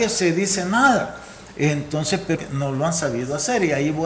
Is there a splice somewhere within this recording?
yes; 1 cut; at 2.4 s

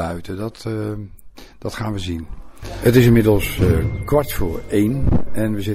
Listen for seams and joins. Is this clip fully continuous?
yes; 0 cuts

